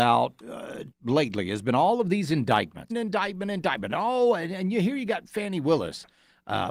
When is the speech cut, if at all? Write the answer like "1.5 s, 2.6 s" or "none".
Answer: 0.9 s, 2.9 s